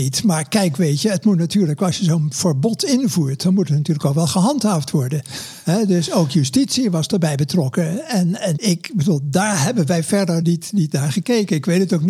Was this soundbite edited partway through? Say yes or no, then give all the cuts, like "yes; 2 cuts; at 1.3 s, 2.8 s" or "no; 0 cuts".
yes; 2 cuts; at 8.6 s, 10.4 s